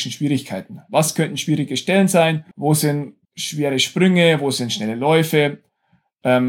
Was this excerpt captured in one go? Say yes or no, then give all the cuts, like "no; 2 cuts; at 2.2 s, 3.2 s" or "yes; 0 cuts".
no; 2 cuts; at 2.5 s, 3.2 s